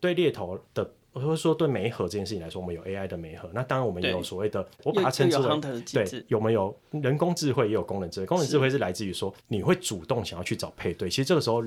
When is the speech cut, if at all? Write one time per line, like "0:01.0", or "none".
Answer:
0:04.7
0:09.4